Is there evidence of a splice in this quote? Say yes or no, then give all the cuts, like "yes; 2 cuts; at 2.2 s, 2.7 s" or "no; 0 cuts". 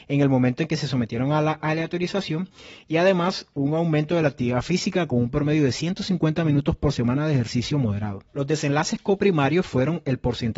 yes; 1 cut; at 8.3 s